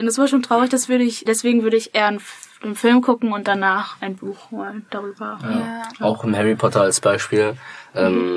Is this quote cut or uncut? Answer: cut